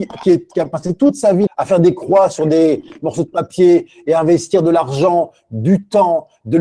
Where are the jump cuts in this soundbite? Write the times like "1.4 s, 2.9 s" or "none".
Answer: 1.5 s